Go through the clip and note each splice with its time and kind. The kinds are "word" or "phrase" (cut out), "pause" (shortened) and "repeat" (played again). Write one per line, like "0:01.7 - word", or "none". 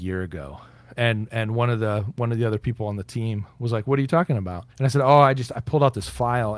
0:04.7 - pause

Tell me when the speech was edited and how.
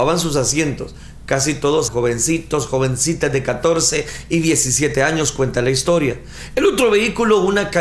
0:01.9 - word

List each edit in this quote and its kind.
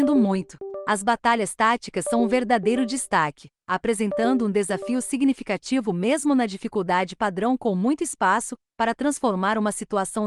none

